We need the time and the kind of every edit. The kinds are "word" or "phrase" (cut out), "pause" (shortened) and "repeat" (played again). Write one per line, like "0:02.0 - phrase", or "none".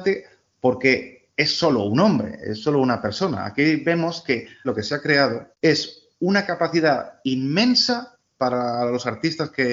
0:04.6 - word
0:05.5 - pause